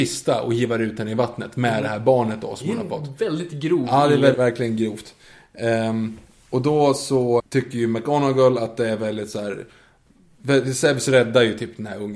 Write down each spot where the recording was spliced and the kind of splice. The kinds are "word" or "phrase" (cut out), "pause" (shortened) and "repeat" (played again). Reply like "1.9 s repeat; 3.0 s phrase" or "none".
4.3 s word; 7.4 s word